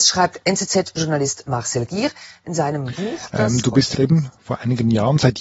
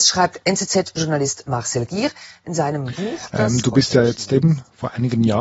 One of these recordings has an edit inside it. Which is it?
first; 1 cut; at 3.9 s

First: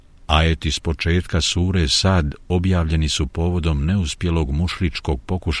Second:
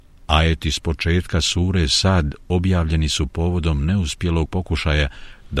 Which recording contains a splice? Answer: second; 1 cut; at 4.5 s

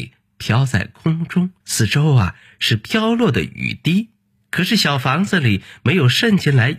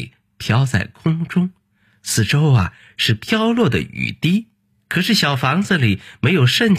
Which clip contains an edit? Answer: first; 1 cut; at 1.6 s

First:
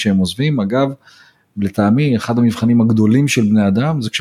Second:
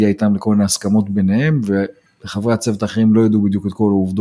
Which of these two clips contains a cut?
second; 1 cut; at 2.1 s

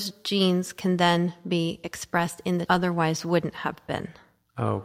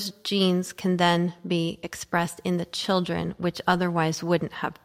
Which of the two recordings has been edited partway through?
first; 1 cut; at 2.7 s

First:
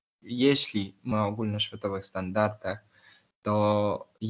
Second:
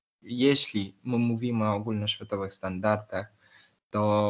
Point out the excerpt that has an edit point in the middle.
first; 1 cut; at 1.1 s

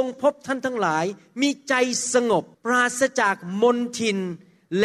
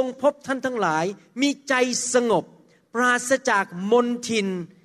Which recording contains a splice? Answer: first; 1 cut; at 2.5 s

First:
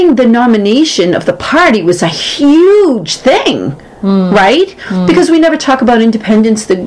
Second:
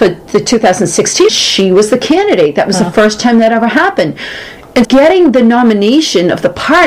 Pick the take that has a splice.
second; 2 cuts; at 1.3 s, 4.8 s

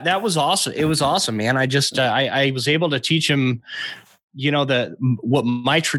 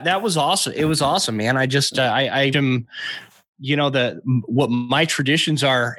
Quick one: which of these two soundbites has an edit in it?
second; 1 cut; at 2.5 s

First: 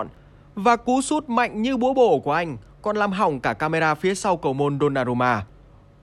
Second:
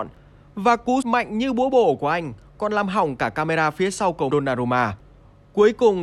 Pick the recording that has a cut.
second; 2 cuts; at 1.0 s, 4.3 s

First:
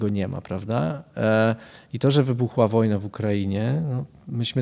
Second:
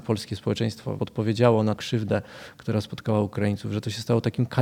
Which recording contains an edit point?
second; 2 cuts; at 1.0 s, 1.8 s

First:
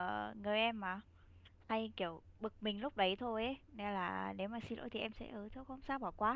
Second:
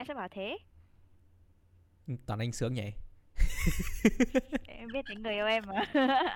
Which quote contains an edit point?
first; 1 cut; at 3.6 s

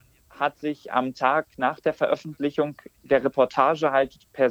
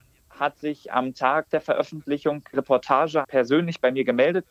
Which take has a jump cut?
second; 3 cuts; at 1.5 s, 2.5 s, 3.2 s

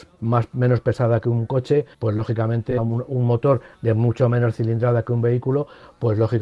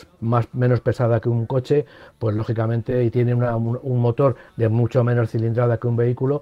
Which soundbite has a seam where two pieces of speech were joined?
first; 2 cuts; at 1.9 s, 2.8 s

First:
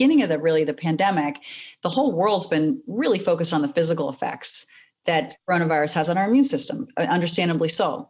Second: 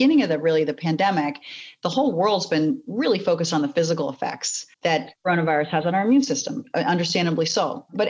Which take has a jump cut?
second; 1 cut; at 4.7 s

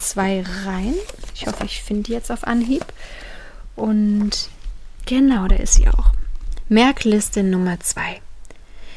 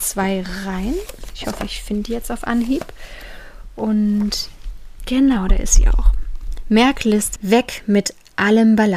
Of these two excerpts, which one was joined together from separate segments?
second; 1 cut; at 7.4 s

